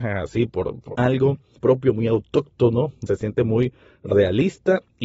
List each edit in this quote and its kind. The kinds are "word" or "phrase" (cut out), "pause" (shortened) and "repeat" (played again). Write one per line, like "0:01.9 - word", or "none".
0:00.9 - phrase
0:01.6 - word
0:03.1 - phrase